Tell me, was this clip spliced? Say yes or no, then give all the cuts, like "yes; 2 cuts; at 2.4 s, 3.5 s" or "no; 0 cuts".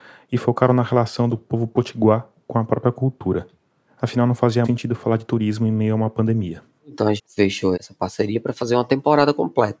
yes; 3 cuts; at 4.6 s, 7.2 s, 7.7 s